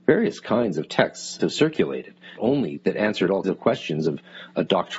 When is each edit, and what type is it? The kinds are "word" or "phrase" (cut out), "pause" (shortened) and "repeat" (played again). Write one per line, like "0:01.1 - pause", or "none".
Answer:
0:01.4 - word
0:02.4 - word
0:02.8 - word
0:03.4 - word